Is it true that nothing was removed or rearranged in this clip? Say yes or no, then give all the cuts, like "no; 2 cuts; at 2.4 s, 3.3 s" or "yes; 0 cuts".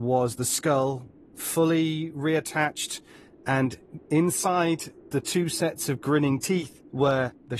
yes; 0 cuts